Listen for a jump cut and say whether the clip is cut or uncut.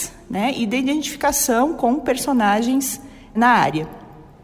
cut